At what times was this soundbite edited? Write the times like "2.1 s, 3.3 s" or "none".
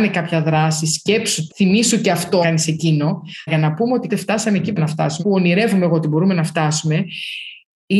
1.5 s, 2.4 s, 3.5 s, 4.1 s, 4.8 s, 5.2 s